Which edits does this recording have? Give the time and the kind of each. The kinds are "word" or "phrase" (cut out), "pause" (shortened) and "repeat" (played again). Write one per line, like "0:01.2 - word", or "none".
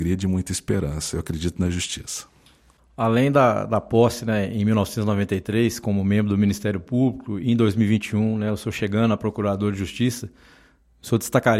none